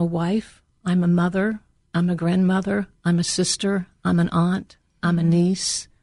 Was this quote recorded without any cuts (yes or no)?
yes